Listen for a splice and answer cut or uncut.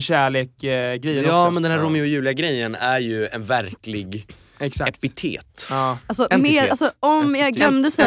uncut